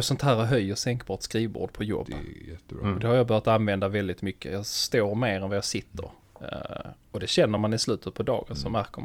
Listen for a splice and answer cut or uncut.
uncut